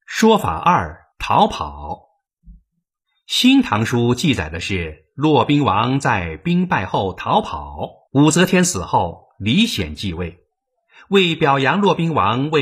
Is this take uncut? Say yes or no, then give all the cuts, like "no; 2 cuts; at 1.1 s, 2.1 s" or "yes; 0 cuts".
no; 2 cuts; at 1.1 s, 8.1 s